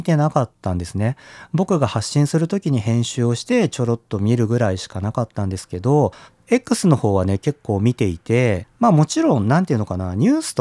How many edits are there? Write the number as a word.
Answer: one